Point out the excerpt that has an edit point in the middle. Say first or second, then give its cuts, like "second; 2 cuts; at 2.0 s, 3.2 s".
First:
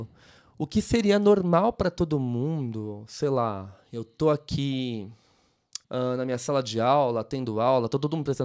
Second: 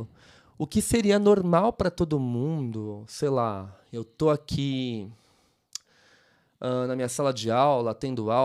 first; 1 cut; at 5.8 s